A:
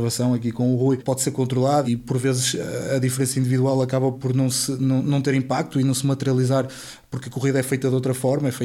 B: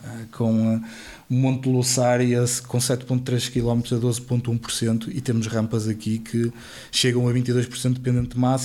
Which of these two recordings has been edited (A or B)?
A